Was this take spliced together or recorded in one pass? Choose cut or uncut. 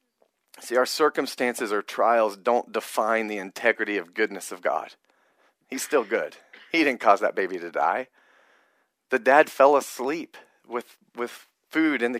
uncut